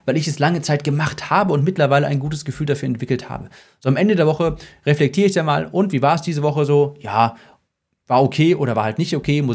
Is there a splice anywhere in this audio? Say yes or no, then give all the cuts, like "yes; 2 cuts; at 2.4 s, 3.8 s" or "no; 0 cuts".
no; 0 cuts